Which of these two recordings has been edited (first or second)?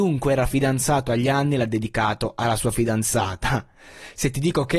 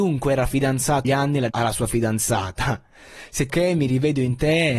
second